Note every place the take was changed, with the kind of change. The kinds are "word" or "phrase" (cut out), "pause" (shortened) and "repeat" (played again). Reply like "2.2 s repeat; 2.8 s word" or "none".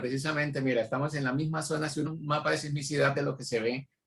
2.1 s word; 3.1 s word